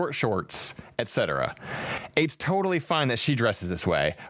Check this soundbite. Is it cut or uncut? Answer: uncut